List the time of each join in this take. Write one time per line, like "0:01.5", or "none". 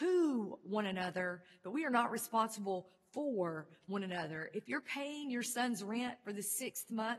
none